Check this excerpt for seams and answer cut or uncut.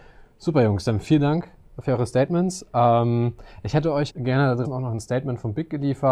cut